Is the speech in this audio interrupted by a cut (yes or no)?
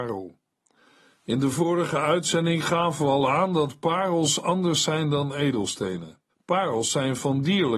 yes